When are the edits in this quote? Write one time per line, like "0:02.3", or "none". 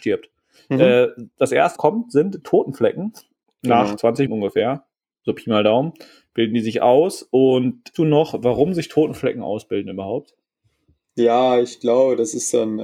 0:01.8
0:02.4
0:04.3
0:07.9

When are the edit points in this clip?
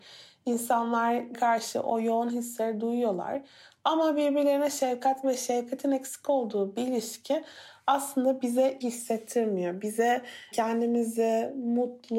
0:01.3
0:05.2
0:08.8
0:10.5

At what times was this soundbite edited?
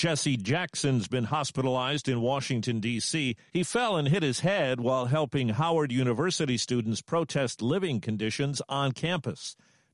none

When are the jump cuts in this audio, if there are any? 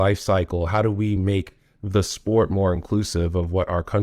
none

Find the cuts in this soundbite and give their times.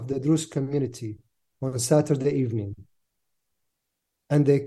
none

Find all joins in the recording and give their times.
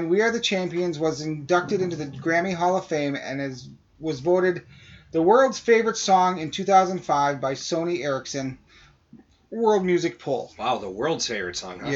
none

